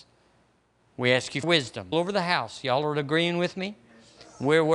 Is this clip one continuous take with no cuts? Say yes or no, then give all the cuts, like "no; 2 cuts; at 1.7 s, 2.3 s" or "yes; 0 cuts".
no; 2 cuts; at 1.4 s, 1.9 s